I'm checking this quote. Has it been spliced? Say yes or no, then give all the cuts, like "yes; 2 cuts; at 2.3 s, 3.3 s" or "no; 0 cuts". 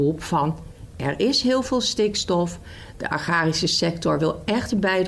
no; 0 cuts